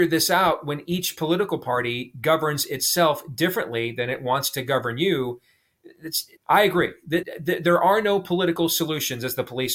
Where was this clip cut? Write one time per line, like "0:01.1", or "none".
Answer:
0:06.4
0:07.2